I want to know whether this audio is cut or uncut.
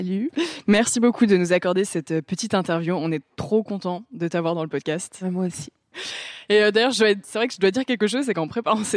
uncut